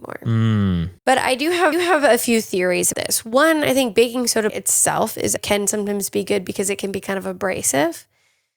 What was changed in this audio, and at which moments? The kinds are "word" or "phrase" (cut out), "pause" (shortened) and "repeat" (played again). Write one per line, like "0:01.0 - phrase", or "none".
0:01.0 - pause
0:01.7 - repeat
0:02.9 - word
0:04.5 - word
0:05.4 - word